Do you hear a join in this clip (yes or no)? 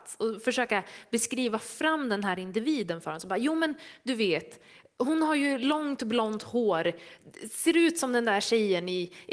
no